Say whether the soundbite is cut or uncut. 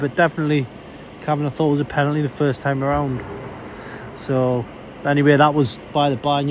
uncut